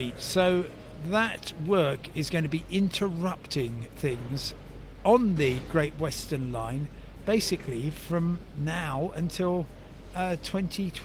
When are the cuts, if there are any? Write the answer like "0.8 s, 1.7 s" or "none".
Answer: none